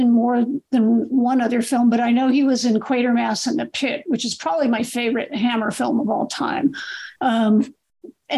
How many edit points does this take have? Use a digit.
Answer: 1